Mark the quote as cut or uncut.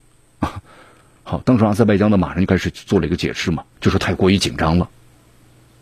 cut